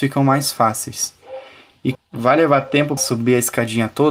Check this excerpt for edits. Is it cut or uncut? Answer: cut